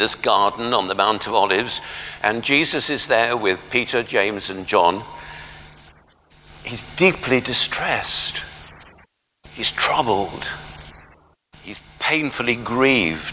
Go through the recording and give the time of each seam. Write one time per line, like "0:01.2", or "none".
none